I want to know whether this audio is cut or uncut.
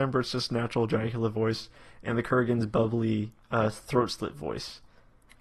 uncut